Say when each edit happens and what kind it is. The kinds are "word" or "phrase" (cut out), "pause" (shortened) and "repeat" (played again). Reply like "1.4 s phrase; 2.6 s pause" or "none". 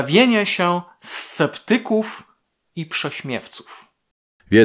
none